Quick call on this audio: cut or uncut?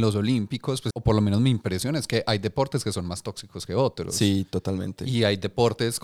cut